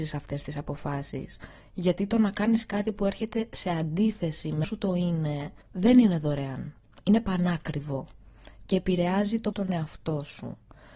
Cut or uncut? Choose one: cut